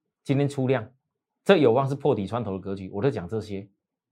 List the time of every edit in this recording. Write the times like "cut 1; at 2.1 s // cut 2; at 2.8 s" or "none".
cut 1; at 1.1 s